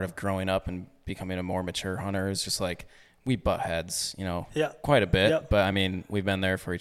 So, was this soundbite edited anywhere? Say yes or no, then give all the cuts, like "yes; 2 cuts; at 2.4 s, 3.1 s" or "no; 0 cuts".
no; 0 cuts